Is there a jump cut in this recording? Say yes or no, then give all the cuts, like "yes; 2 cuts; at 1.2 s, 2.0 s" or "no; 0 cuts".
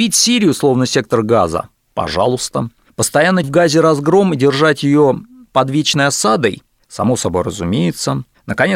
yes; 1 cut; at 3.4 s